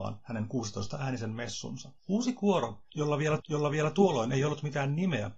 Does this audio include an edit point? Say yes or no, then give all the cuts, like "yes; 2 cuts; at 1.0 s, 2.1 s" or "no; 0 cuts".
yes; 2 cuts; at 2.0 s, 3.4 s